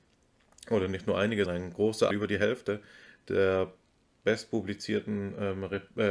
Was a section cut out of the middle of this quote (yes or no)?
yes